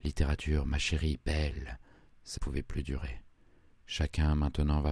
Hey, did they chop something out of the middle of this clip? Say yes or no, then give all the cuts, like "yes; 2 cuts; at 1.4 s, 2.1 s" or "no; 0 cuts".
yes; 1 cut; at 2.4 s